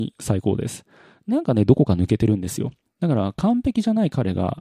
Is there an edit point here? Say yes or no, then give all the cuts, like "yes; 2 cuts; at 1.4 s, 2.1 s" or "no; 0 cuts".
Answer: no; 0 cuts